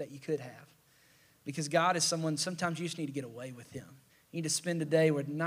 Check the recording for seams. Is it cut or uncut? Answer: cut